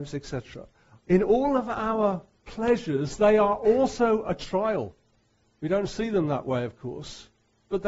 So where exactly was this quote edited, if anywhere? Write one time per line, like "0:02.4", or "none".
0:05.2